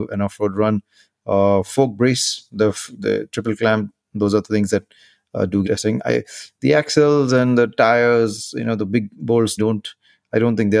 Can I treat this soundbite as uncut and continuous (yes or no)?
no